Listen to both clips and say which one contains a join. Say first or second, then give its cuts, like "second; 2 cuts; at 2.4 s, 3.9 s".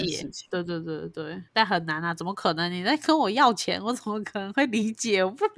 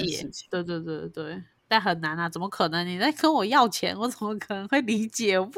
first; 1 cut; at 1.5 s